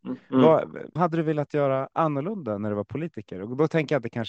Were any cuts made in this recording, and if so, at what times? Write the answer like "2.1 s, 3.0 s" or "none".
1.0 s